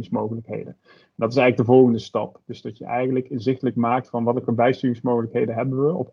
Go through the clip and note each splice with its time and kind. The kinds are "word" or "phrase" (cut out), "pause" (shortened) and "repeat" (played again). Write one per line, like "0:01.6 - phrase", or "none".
none